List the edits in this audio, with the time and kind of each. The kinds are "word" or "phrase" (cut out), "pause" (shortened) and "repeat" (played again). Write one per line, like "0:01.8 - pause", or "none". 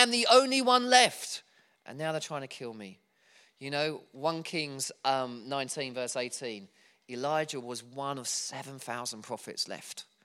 none